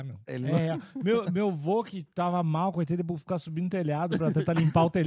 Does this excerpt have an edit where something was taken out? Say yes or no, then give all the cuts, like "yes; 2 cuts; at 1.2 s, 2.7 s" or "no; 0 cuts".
no; 0 cuts